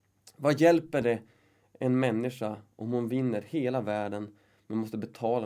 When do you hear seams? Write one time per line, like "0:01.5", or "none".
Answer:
none